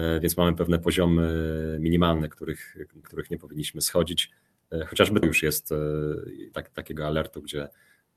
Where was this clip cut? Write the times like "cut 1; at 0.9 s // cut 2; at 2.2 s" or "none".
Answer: cut 1; at 3.0 s // cut 2; at 5.2 s // cut 3; at 6.5 s